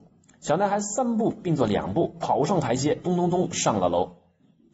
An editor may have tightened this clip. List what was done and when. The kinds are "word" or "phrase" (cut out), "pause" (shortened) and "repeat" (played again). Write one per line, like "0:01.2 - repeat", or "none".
0:03.0 - phrase